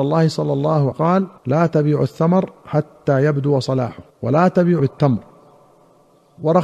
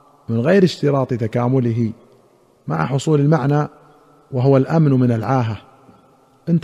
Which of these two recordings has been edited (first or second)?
first